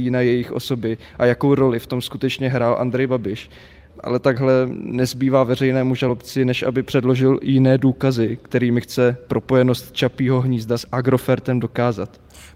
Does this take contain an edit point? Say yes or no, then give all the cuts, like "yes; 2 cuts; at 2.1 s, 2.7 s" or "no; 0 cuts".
no; 0 cuts